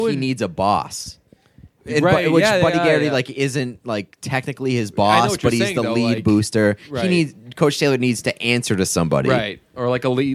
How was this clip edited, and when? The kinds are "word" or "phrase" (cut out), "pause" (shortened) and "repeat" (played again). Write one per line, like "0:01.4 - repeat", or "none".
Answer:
none